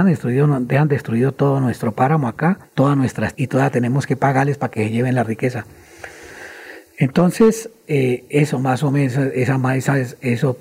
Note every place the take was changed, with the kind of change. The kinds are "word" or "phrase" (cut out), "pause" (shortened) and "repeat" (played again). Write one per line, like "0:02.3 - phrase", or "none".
0:02.6 - pause
0:03.3 - word
0:07.8 - word